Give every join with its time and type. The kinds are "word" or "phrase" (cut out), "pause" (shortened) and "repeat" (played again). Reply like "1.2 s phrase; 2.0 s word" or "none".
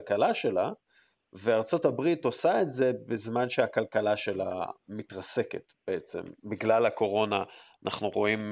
none